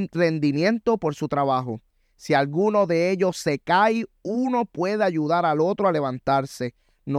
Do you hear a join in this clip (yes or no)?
no